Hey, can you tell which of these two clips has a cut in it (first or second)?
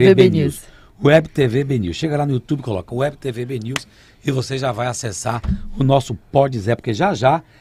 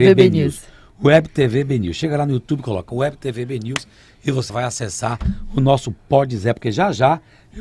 second